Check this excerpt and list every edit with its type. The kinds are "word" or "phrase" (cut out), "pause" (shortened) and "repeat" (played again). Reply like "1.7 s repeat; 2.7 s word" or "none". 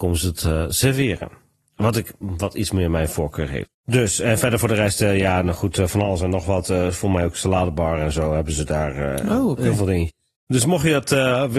none

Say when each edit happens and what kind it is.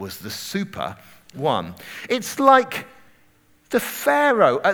1.3 s word

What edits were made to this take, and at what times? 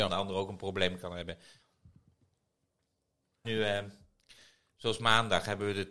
3.4 s word

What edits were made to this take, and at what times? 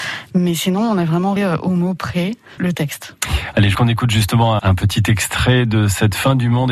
1.4 s word; 2.6 s word; 3.7 s phrase; 4.6 s word

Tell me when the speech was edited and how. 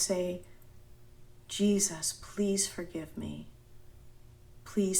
none

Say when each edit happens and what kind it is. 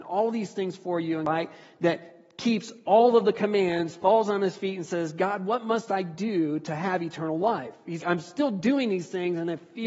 8.0 s word

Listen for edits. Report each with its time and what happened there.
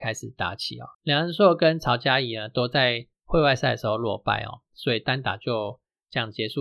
0.9 s pause

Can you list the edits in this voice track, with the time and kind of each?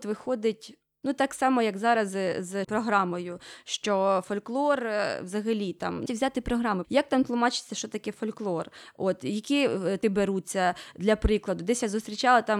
2.6 s word; 6.1 s word; 6.8 s word; 10.0 s word

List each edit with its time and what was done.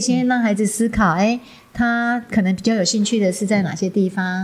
none

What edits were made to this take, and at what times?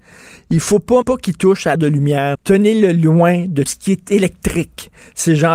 1.0 s word; 1.7 s word; 2.3 s phrase; 3.7 s word

